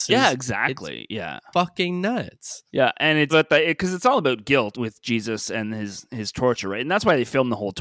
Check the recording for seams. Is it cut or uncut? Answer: cut